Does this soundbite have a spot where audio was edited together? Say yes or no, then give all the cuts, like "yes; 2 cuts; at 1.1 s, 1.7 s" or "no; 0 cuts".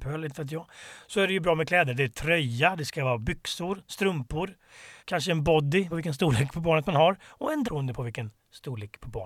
yes; 3 cuts; at 5.0 s, 5.9 s, 7.6 s